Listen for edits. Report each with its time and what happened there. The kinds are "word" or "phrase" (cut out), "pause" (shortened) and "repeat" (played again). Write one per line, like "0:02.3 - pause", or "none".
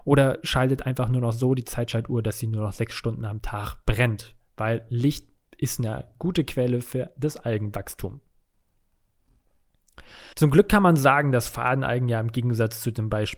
0:10.3 - pause